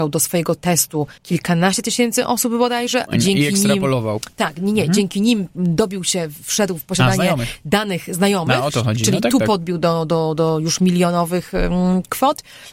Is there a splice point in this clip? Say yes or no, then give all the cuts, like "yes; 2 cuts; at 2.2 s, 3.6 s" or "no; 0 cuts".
yes; 1 cut; at 1.2 s